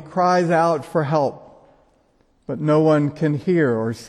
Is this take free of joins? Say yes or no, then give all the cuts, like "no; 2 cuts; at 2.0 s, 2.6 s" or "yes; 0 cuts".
yes; 0 cuts